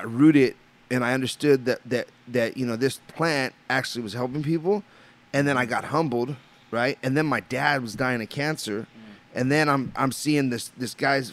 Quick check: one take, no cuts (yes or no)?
yes